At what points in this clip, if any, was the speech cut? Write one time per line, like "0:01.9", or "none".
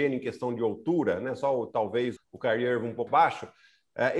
0:02.2
0:03.1